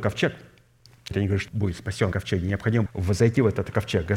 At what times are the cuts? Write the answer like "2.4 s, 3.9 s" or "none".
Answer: 1.1 s, 1.5 s, 2.1 s, 2.9 s

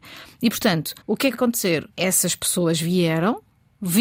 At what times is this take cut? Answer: 1.0 s, 1.3 s, 1.9 s

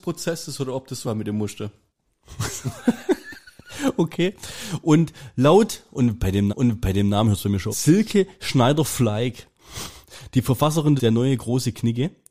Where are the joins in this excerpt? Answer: 1.0 s, 6.5 s, 7.7 s, 11.0 s

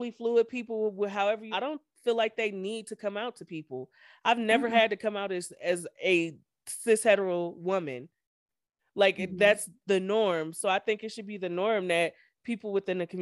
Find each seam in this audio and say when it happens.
1.5 s

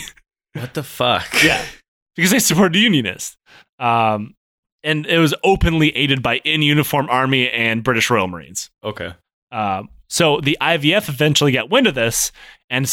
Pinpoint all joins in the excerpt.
none

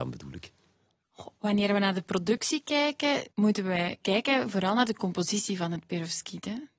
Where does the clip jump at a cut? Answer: 3.3 s

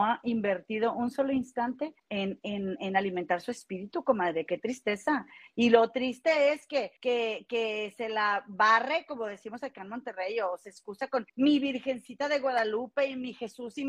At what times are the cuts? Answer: 2.0 s, 7.0 s, 11.3 s

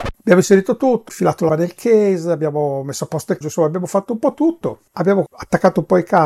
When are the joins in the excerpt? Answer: 1.1 s, 1.5 s, 3.4 s

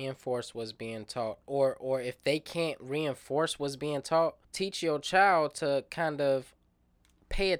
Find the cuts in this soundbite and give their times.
4.4 s

